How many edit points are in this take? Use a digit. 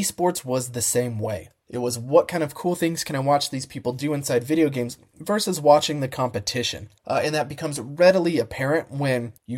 2